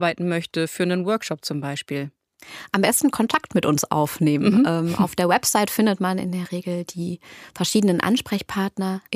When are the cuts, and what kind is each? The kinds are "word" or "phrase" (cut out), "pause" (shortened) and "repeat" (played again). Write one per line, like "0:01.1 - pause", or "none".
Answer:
none

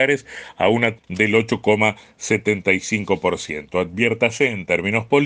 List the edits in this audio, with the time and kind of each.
0:01.0 - word

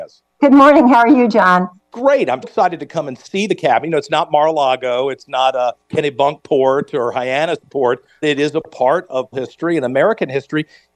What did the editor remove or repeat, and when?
0:01.8 - pause
0:02.4 - word
0:05.8 - pause
0:08.2 - word
0:09.3 - word

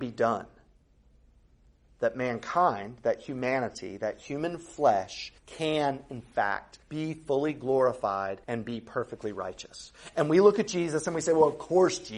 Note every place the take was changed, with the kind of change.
0:05.4 - pause
0:06.8 - pause
0:08.4 - pause

